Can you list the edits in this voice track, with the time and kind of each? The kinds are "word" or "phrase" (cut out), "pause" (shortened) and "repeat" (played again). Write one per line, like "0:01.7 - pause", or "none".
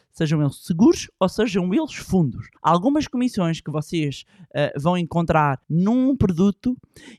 0:02.6 - pause
0:05.6 - pause